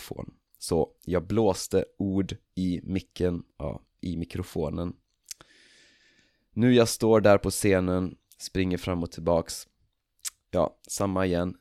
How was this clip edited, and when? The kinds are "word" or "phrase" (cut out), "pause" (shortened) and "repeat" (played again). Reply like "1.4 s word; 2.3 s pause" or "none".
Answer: none